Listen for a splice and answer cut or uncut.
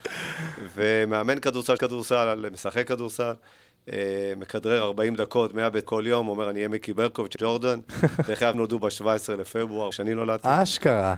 cut